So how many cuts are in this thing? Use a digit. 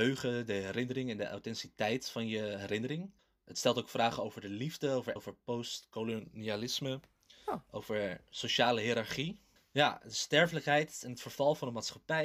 2